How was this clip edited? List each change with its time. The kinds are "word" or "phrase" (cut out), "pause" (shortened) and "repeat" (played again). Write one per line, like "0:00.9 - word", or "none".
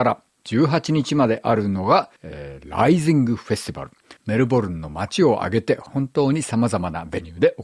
0:02.2 - pause
0:04.2 - pause